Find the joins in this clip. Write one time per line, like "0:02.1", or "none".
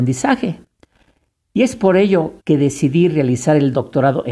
0:02.4

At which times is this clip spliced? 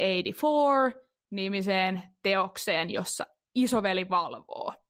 none

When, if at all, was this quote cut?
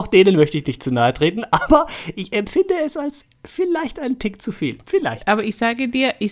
0:04.8

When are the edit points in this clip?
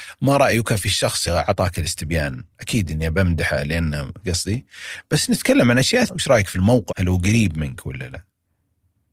0:01.3
0:04.2
0:06.1
0:06.9

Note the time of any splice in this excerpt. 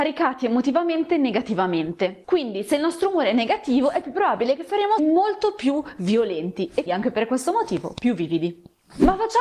0:05.0
0:06.9

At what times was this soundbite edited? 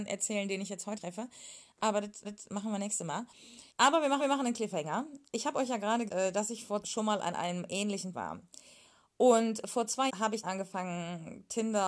0:01.0
0:02.2
0:03.7
0:04.2
0:06.1
0:06.8
0:08.1
0:10.1
0:10.4

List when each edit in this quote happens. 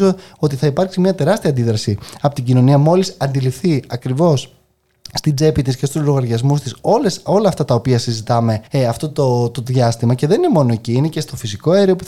0:08.7

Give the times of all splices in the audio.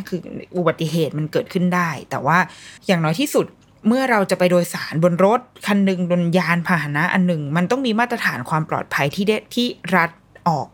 0:02.8

